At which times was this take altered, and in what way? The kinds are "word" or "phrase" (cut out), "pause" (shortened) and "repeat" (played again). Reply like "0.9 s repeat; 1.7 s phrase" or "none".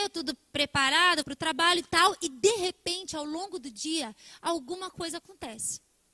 1.2 s word